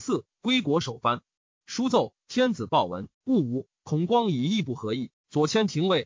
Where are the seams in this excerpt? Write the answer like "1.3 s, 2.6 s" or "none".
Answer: 3.1 s